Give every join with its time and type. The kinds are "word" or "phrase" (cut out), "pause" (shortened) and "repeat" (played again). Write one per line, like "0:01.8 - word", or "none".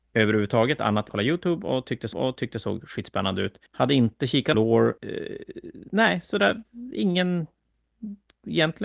0:01.1 - phrase
0:02.1 - repeat
0:03.7 - pause
0:04.5 - word
0:05.0 - pause